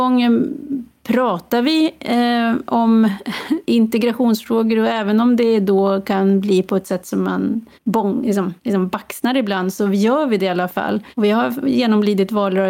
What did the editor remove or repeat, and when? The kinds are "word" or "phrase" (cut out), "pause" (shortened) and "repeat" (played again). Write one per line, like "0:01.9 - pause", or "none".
0:03.6 - pause
0:07.8 - pause
0:08.6 - pause
0:11.1 - pause